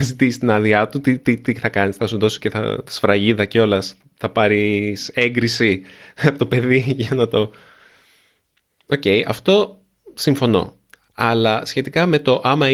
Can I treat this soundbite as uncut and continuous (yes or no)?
yes